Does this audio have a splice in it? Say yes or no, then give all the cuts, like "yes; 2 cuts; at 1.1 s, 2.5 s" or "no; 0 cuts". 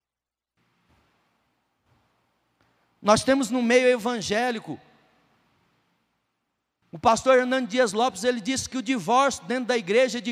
no; 0 cuts